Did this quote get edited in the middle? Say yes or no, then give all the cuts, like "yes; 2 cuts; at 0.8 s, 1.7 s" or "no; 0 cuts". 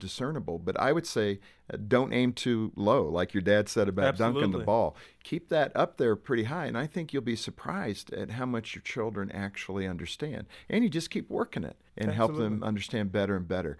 yes; 1 cut; at 11.9 s